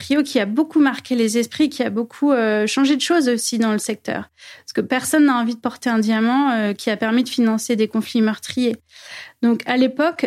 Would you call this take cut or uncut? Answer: uncut